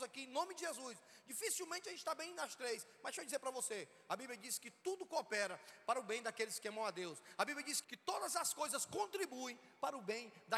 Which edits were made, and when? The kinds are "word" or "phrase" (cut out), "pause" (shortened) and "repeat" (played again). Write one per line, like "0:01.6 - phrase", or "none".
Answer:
0:04.8 - pause
0:07.8 - word